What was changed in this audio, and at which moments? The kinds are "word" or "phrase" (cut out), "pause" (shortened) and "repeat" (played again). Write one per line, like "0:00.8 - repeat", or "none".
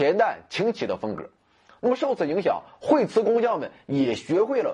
none